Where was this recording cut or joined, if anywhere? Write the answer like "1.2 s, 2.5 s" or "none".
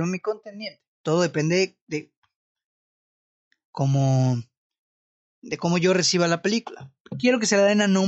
0.9 s